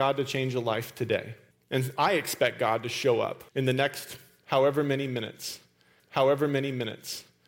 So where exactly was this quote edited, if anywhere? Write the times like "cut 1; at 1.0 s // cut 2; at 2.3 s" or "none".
cut 1; at 1.5 s // cut 2; at 3.5 s // cut 3; at 6.0 s

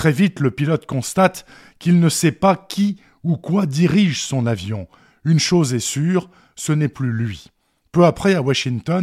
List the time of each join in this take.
none

